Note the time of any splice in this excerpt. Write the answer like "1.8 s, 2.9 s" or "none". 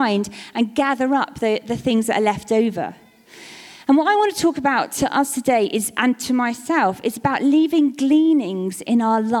none